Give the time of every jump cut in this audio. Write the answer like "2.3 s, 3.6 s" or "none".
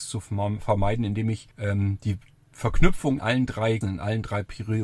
1.5 s, 3.2 s, 3.8 s

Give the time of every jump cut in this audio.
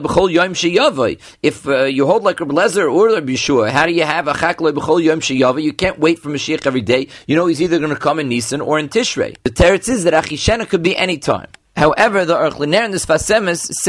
none

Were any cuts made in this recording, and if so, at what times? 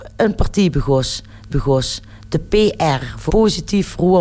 1.5 s, 3.3 s

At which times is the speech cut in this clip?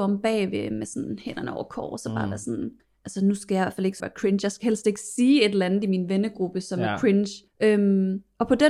2.8 s, 4.0 s, 7.5 s

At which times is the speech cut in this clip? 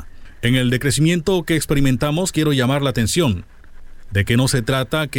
none

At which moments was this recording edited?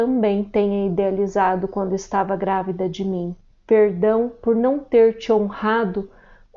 3.5 s

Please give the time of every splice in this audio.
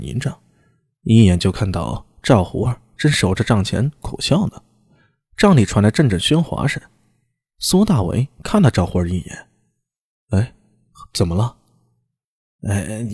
none

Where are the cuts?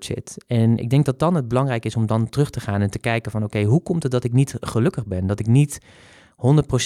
none

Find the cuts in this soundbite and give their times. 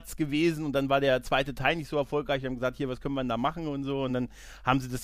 none

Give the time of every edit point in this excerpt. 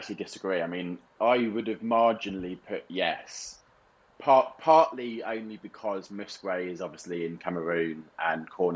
1.2 s

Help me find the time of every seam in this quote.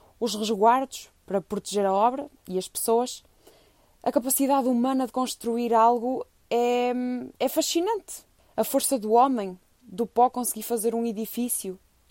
7.3 s, 8.4 s

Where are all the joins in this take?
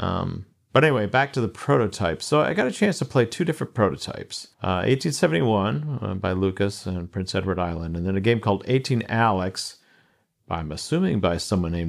4.5 s

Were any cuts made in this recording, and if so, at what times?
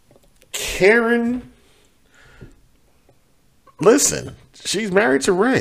none

